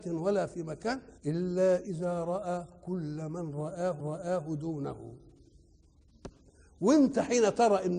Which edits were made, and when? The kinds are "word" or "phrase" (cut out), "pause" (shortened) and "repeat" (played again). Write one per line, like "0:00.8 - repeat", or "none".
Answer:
0:01.2 - pause
0:04.0 - repeat